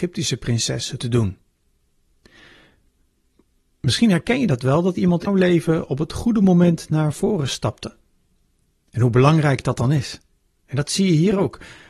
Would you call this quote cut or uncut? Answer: cut